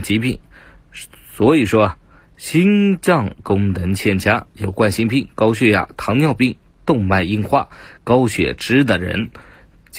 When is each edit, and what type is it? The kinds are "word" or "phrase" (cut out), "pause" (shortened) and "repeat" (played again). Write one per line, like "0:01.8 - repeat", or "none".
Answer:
none